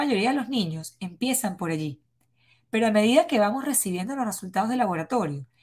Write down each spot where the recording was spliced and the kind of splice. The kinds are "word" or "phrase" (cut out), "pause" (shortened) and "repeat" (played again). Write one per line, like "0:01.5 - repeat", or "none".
none